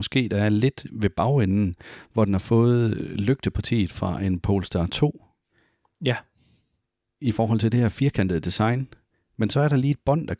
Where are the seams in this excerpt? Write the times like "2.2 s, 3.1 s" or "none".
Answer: none

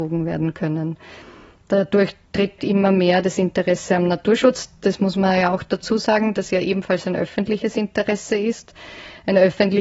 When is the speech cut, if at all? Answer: 2.6 s

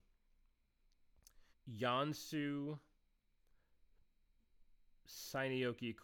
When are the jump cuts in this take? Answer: 1.5 s

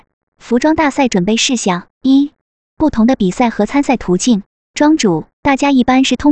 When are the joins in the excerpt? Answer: 1.9 s, 4.5 s, 5.3 s

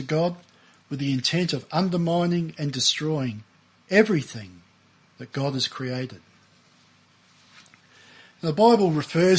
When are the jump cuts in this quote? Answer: none

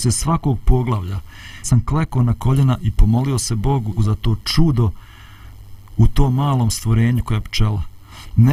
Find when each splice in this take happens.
1.6 s, 4.0 s

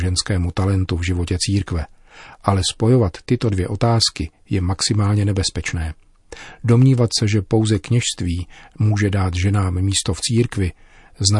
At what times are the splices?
none

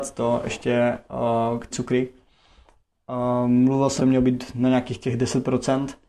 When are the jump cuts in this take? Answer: 1.7 s, 4.0 s

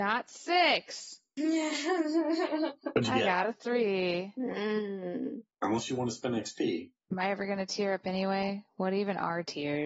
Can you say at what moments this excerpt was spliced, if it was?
5.5 s, 7.0 s

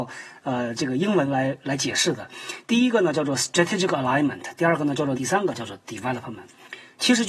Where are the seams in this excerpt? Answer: 5.1 s

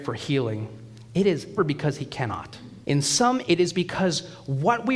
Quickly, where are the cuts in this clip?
1.6 s, 2.8 s, 3.5 s

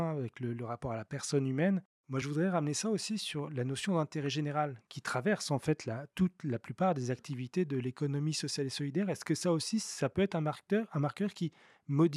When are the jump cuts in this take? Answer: none

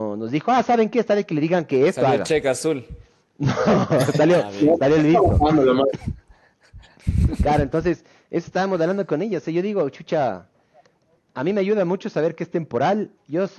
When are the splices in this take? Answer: none

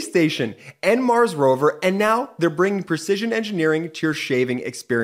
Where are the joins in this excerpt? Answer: none

